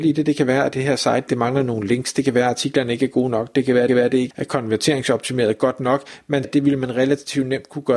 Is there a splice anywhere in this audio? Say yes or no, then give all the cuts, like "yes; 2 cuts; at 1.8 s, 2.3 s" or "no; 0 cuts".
yes; 4 cuts; at 1.3 s, 3.9 s, 4.3 s, 6.4 s